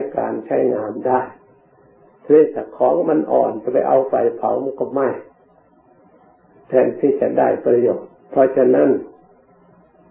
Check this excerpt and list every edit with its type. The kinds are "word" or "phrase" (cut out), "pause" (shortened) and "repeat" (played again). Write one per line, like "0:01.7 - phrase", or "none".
0:08.2 - pause